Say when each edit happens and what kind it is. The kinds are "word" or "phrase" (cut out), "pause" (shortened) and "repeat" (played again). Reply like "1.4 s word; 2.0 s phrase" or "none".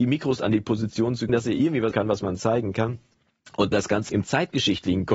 1.3 s word; 1.9 s word; 3.7 s word; 4.1 s word

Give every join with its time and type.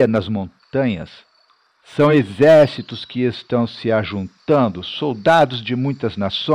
none

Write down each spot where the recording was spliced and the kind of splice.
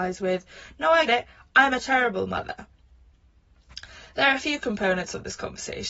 1.1 s word

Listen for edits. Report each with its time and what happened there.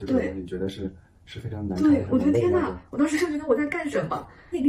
1.1 s pause

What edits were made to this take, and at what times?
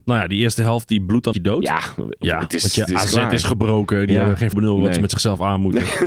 1.3 s phrase; 4.5 s word

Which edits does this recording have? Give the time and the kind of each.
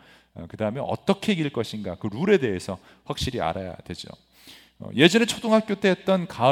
none

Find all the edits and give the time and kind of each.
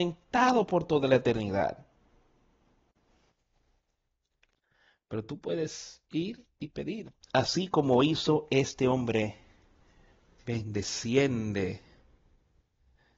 7.2 s pause

